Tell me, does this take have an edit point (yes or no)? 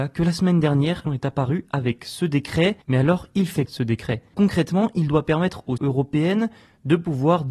yes